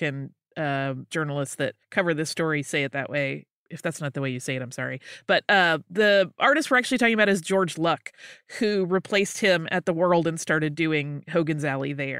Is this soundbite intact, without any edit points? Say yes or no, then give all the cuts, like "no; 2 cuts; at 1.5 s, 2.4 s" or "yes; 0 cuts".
no; 1 cut; at 1.8 s